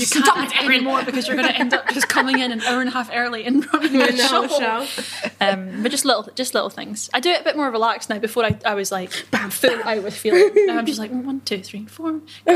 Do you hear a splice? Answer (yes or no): no